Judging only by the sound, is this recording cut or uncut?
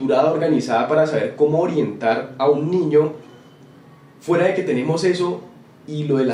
uncut